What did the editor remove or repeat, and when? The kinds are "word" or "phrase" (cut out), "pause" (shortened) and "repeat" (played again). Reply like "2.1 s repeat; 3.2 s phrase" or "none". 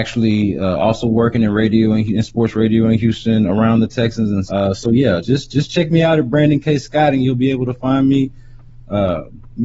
4.5 s word; 5.2 s word